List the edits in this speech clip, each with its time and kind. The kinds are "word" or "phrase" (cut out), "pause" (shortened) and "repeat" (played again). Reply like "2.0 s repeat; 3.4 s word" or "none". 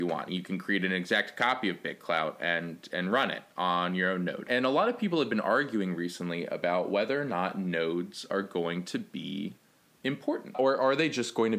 none